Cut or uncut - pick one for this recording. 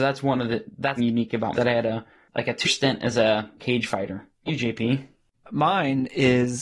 cut